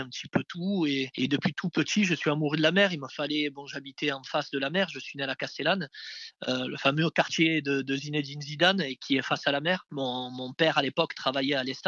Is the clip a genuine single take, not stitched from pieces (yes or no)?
yes